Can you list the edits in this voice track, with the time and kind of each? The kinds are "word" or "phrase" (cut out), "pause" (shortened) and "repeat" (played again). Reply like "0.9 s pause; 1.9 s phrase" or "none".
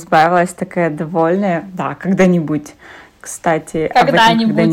none